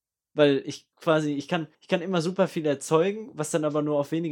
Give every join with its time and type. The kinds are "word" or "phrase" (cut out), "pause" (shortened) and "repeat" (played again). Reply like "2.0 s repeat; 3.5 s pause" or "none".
0.9 s pause; 1.7 s pause